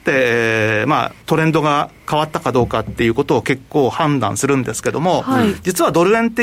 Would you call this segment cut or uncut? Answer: cut